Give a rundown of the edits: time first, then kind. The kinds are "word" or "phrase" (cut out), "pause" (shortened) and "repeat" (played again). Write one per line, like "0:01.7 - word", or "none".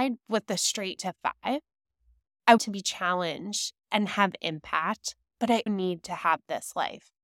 0:01.0 - word
0:02.6 - word
0:05.7 - word